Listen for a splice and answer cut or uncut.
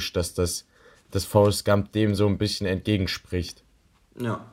uncut